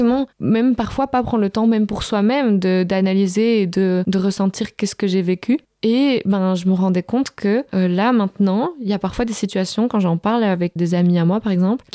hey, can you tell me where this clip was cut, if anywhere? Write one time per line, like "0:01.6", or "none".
0:10.8